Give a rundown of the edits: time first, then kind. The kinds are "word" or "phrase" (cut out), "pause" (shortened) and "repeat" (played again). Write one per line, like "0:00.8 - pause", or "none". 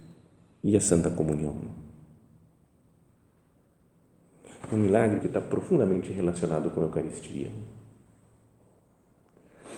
0:05.2 - word